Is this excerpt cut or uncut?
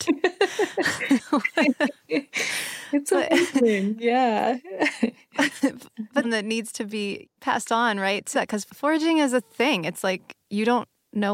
cut